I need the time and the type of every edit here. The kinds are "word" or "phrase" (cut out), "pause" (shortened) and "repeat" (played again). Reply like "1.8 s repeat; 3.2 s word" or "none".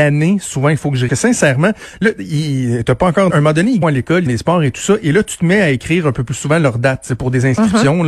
1.1 s phrase; 3.3 s phrase; 3.8 s phrase; 4.3 s phrase

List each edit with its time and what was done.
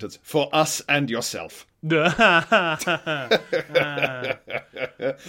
1.7 s pause

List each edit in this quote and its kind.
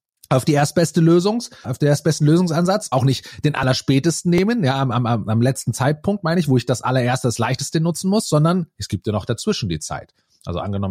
1.6 s word; 2.9 s word

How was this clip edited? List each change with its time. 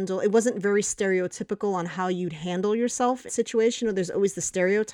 3.3 s word

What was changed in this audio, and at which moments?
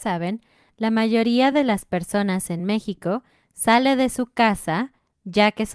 none

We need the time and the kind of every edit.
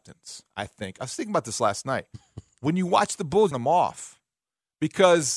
3.5 s phrase

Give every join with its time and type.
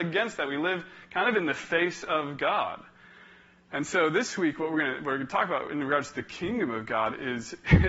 none

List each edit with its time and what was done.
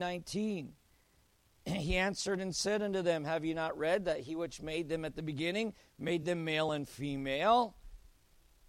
none

